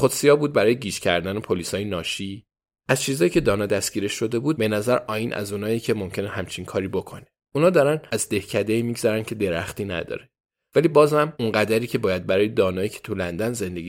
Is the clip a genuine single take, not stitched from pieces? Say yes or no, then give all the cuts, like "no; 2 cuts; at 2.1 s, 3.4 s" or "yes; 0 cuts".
yes; 0 cuts